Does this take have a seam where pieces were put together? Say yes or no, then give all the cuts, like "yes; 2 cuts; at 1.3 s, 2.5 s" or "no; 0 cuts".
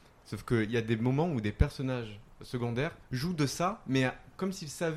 no; 0 cuts